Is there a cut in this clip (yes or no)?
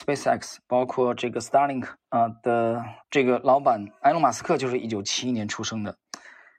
yes